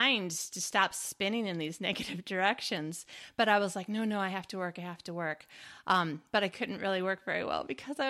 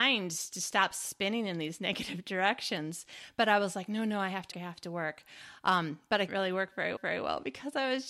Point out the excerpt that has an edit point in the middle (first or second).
second